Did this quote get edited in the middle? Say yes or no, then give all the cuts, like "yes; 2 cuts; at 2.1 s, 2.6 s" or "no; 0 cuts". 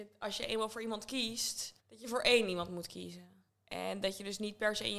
yes; 2 cuts; at 1.8 s, 3.5 s